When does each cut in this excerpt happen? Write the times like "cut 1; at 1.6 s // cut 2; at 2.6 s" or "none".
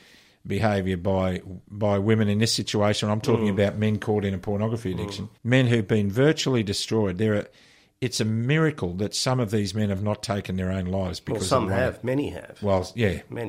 cut 1; at 5.4 s